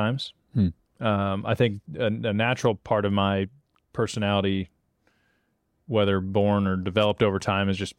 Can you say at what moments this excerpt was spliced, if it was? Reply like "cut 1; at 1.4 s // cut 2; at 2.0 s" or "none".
none